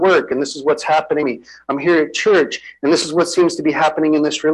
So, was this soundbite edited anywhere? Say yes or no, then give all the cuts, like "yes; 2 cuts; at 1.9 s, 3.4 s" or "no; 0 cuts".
yes; 1 cut; at 1.2 s